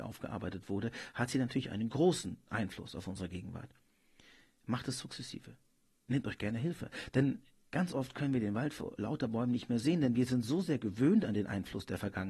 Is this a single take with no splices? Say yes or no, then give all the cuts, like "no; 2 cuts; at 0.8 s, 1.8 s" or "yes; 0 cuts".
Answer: yes; 0 cuts